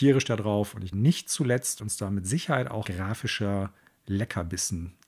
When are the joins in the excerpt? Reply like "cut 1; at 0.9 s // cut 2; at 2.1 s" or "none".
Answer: cut 1; at 0.9 s // cut 2; at 1.8 s // cut 3; at 2.8 s